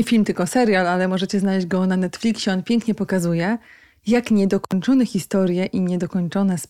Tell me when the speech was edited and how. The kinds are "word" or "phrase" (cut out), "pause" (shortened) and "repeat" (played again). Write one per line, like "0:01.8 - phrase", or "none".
none